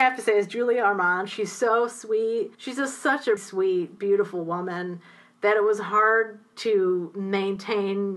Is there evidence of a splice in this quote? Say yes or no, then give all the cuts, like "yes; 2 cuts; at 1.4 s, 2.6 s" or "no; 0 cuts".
yes; 2 cuts; at 2.5 s, 3.4 s